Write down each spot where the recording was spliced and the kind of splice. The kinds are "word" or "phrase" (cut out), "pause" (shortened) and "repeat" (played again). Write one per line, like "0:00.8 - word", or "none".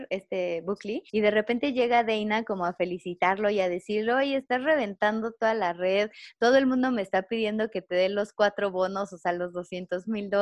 0:01.1 - pause